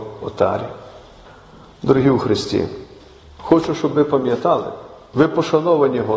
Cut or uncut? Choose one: uncut